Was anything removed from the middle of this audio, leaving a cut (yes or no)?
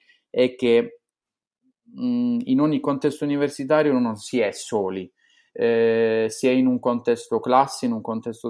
no